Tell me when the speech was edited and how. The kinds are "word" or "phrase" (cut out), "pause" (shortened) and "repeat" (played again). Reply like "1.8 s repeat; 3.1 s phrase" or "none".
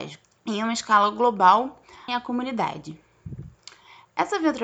2.1 s phrase